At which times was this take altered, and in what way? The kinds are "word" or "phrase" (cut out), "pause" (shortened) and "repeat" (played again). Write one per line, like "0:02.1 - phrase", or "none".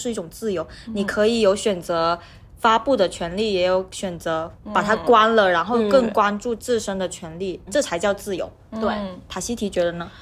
0:07.7 - word
0:09.3 - word